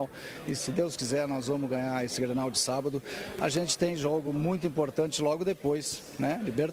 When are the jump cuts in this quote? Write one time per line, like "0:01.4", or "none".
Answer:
none